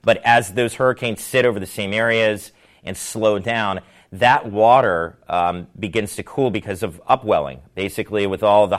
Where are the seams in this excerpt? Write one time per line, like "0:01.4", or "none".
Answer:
none